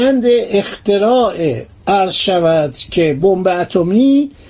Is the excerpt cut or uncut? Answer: uncut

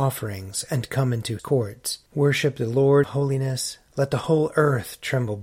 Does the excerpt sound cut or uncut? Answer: cut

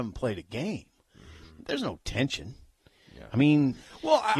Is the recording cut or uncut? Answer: uncut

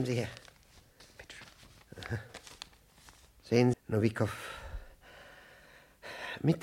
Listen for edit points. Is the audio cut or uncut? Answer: cut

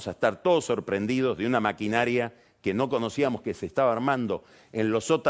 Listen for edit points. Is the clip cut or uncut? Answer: uncut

